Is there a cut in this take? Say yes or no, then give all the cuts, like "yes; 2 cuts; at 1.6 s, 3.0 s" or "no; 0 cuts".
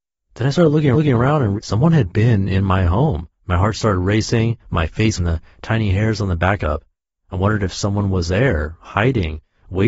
yes; 7 cuts; at 0.9 s, 1.6 s, 3.3 s, 4.6 s, 5.2 s, 6.6 s, 8.3 s